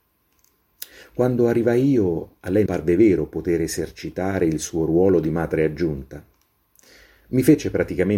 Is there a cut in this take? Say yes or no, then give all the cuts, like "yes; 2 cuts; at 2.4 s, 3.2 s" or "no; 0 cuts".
yes; 1 cut; at 2.7 s